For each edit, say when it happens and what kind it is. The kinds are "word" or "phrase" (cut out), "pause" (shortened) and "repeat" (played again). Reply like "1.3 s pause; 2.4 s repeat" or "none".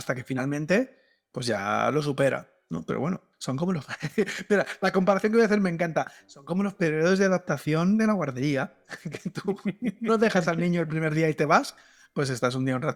none